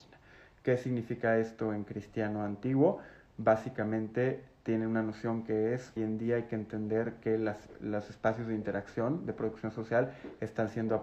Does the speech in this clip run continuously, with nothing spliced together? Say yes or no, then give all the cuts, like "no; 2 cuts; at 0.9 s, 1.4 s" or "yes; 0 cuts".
no; 1 cut; at 6.0 s